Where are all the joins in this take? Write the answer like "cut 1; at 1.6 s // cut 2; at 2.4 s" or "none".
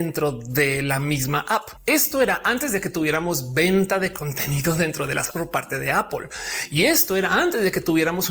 cut 1; at 5.3 s